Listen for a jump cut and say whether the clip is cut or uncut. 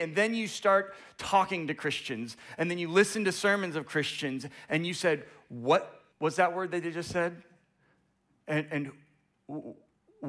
cut